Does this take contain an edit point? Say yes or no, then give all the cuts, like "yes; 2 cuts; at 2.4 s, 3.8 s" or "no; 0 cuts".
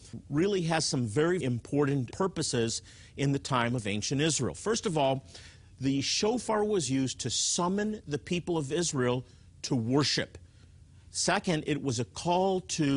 yes; 1 cut; at 1.4 s